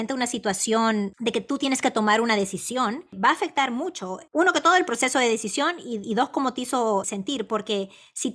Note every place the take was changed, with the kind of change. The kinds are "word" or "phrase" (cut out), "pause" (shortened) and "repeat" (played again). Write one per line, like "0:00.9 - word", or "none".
0:04.3 - pause
0:06.0 - word
0:07.0 - word